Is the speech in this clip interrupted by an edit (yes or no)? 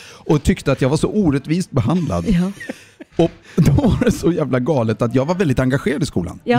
yes